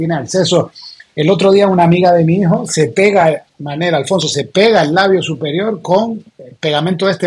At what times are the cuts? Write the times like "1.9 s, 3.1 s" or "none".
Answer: 3.5 s, 6.3 s